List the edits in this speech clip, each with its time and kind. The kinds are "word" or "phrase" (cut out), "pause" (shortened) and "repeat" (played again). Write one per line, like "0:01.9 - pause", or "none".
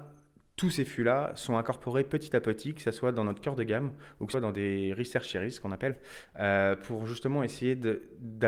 0:04.3 - word